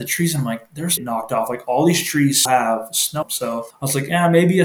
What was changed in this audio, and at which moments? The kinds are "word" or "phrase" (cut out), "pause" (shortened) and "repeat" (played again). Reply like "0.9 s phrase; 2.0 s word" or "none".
1.0 s phrase; 2.5 s word; 3.2 s word; 3.7 s pause